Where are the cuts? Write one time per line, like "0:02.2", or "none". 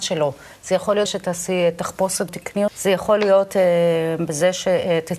0:01.1
0:02.3
0:02.7

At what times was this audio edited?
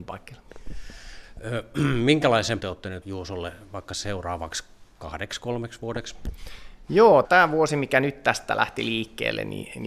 0:02.6
0:03.0
0:04.9
0:07.2

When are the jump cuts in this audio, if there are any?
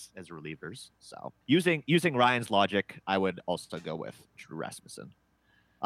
0:01.4

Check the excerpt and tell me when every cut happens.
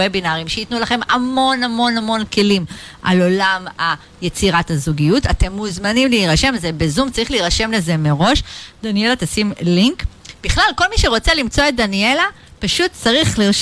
none

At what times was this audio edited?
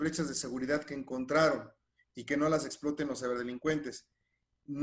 none

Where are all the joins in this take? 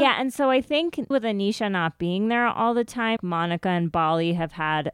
0:01.1
0:03.2

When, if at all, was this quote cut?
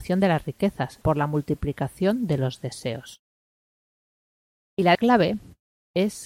0:01.0
0:04.9

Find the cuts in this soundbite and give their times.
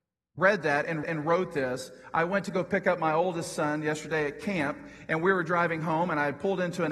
0:01.0

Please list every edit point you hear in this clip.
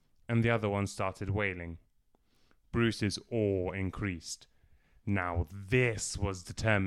none

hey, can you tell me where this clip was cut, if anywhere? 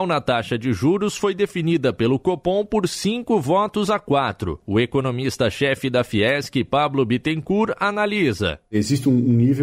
none

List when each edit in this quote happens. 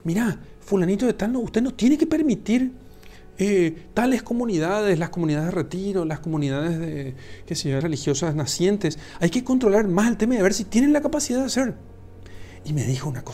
0:07.8

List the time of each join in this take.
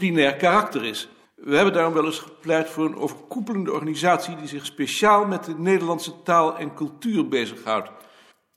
0:01.2

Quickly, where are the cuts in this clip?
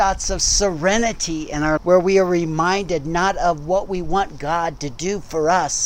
0:01.8

